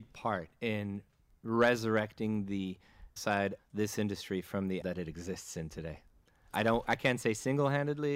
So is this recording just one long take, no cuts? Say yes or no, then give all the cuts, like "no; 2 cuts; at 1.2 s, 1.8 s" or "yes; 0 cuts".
no; 3 cuts; at 3.2 s, 3.6 s, 4.8 s